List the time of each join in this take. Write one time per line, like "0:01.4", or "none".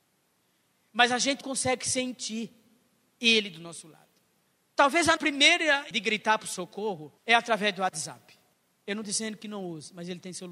0:01.4
0:05.2
0:05.9
0:07.2
0:09.0

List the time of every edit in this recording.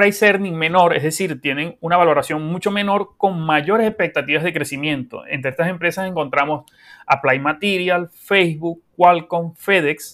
none

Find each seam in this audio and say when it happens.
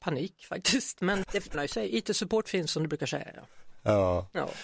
0:01.2
0:01.5

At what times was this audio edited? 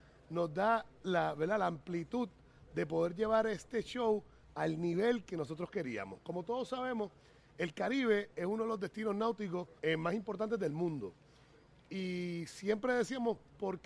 0:09.8

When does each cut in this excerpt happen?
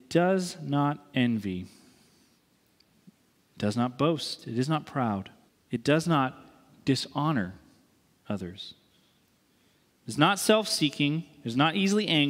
0:05.5

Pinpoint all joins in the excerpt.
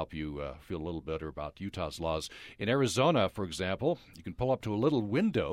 none

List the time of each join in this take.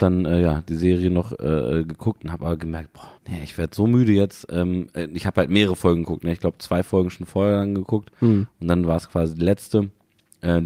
0:03.2

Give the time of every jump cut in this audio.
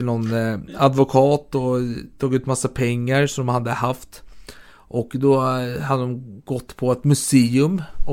none

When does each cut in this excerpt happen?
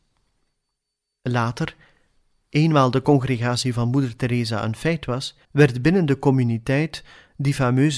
0:05.4

